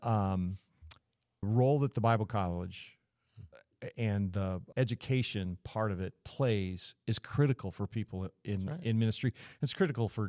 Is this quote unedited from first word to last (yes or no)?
no